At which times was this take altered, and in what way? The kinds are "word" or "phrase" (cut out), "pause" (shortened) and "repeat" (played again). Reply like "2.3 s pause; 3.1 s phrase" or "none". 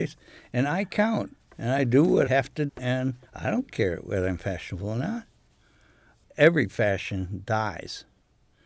1.5 s pause; 2.3 s word; 2.7 s word; 3.2 s pause